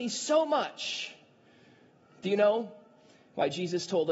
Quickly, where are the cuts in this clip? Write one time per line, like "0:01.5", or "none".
none